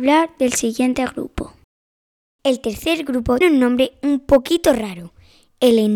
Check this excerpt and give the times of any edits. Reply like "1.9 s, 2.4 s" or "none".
3.4 s